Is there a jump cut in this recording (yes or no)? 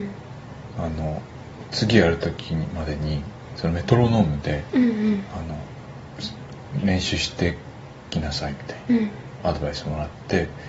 no